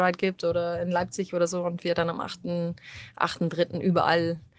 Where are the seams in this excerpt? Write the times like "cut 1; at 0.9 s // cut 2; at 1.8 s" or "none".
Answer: none

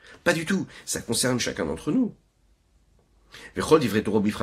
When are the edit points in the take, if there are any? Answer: cut 1; at 1.4 s

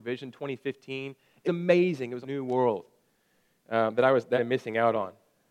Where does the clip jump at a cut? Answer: cut 1; at 1.4 s // cut 2; at 2.2 s // cut 3; at 4.3 s

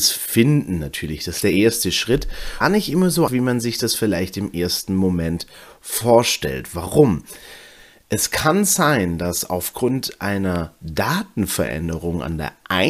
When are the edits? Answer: cut 1; at 1.4 s // cut 2; at 2.6 s // cut 3; at 3.3 s

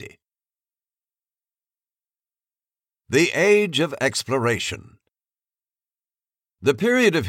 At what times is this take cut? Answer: none

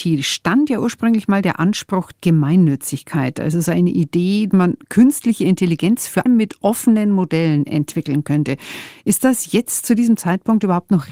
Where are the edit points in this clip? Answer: cut 1; at 2.1 s // cut 2; at 4.5 s // cut 3; at 6.3 s

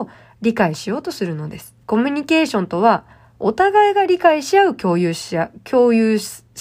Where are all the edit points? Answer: cut 1; at 1.8 s

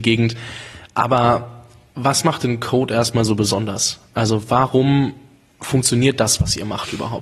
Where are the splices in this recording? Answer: none

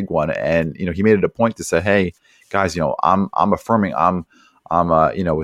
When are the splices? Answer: none

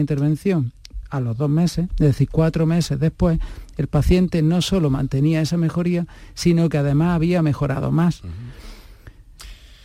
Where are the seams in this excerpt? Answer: none

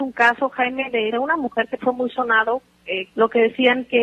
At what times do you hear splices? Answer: cut 1; at 1.1 s // cut 2; at 1.8 s // cut 3; at 3.1 s

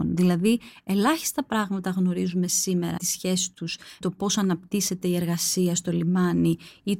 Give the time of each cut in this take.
cut 1; at 3.0 s // cut 2; at 4.0 s

